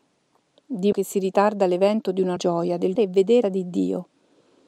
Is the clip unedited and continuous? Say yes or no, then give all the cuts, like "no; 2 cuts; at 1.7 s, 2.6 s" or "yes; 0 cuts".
no; 4 cuts; at 0.9 s, 2.4 s, 3.0 s, 3.4 s